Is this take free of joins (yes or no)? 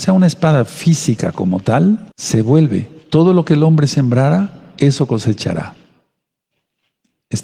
no